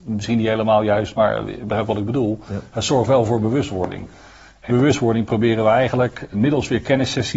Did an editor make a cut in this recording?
yes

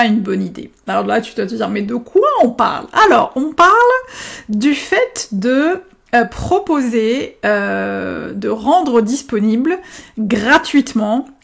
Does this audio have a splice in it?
no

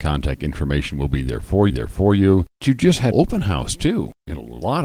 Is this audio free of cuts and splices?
no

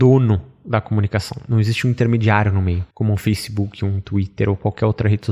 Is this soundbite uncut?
no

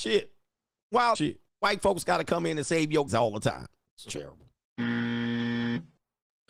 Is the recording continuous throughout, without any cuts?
no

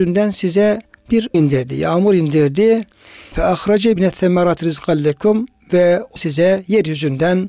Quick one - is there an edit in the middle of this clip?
yes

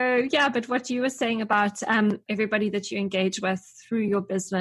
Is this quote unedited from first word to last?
yes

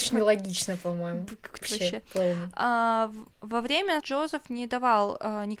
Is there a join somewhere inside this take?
yes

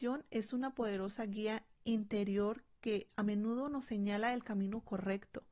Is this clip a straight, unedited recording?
no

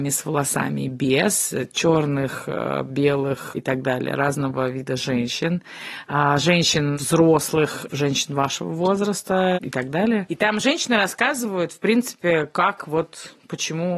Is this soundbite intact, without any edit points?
yes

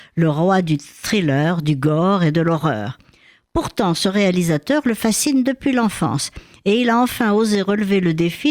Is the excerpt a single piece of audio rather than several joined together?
yes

